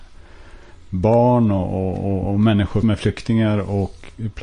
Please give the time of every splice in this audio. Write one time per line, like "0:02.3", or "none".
0:02.8